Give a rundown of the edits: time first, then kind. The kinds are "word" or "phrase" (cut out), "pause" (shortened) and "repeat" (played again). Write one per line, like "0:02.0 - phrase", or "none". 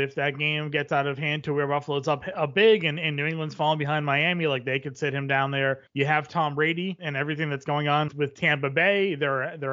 0:05.9 - pause